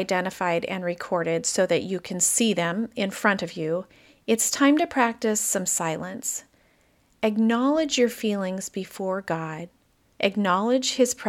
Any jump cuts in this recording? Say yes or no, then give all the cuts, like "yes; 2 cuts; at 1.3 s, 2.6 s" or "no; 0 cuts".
no; 0 cuts